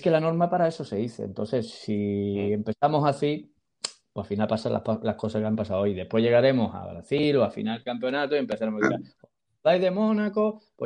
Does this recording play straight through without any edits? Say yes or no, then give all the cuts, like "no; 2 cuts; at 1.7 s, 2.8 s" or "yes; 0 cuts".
yes; 0 cuts